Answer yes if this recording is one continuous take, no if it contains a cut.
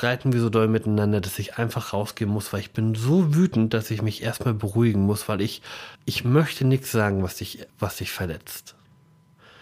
no